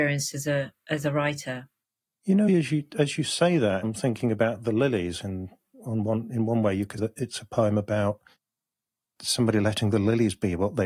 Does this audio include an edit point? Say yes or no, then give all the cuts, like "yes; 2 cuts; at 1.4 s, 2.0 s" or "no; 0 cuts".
yes; 4 cuts; at 2.5 s, 3.8 s, 5.7 s, 7.0 s